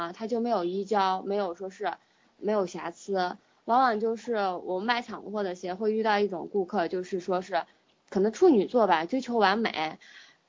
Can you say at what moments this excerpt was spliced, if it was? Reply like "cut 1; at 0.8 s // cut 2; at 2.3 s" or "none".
none